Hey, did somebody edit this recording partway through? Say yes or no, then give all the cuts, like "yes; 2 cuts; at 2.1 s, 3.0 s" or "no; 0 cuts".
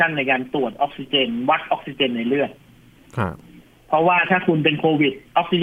yes; 1 cut; at 3.6 s